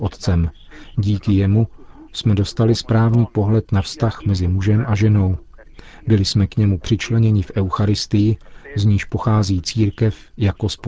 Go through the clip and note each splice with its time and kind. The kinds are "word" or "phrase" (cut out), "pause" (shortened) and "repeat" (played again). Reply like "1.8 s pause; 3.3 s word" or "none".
none